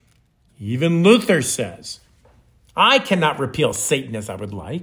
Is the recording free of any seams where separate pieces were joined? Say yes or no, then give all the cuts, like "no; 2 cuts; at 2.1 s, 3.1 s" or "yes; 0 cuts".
yes; 0 cuts